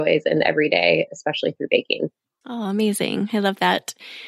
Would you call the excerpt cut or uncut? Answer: uncut